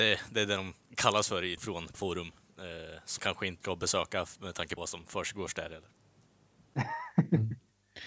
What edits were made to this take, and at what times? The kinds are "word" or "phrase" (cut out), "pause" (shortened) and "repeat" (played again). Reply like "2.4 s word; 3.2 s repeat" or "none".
1.6 s word; 1.9 s word; 3.2 s word; 3.6 s word; 4.8 s word